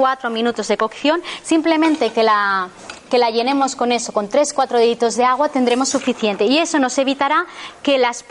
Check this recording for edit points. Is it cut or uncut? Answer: uncut